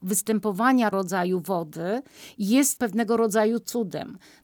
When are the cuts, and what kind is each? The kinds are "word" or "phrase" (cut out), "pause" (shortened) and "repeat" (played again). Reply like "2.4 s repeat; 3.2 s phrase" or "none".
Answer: 0.9 s word; 2.8 s word

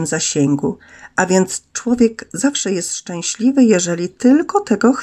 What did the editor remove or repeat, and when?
none

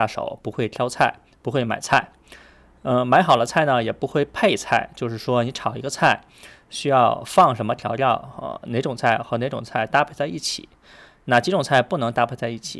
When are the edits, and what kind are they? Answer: none

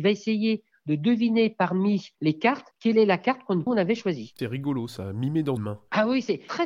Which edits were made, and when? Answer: 2.1 s pause; 2.7 s pause; 3.7 s word; 4.4 s word; 5.6 s word

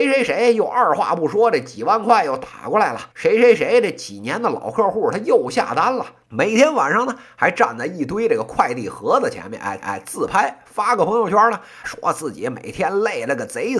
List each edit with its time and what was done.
3.1 s pause; 6.2 s pause; 9.8 s repeat; 11.8 s word

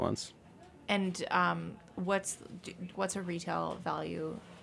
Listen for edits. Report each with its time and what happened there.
2.9 s word

